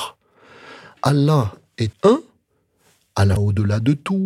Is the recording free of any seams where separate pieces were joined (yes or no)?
no